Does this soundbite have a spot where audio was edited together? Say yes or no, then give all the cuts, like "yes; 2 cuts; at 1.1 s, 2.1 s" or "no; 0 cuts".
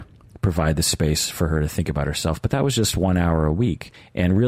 no; 0 cuts